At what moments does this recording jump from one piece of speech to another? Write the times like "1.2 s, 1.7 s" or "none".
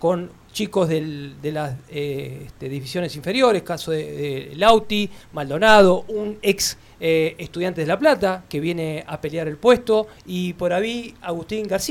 5.2 s, 10.2 s